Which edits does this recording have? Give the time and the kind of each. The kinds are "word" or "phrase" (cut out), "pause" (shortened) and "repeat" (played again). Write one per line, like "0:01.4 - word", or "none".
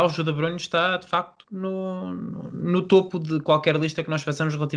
0:01.4 - pause

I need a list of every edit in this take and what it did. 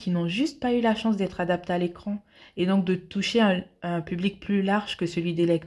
none

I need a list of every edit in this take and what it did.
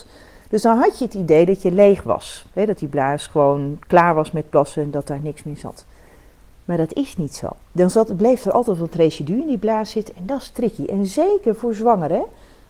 0:07.6 - pause

